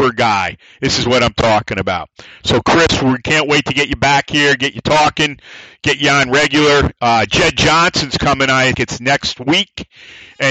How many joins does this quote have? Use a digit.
1